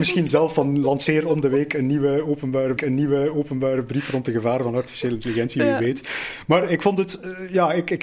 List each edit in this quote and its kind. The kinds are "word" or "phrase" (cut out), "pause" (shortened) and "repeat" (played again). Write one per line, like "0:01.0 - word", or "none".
0:02.8 - repeat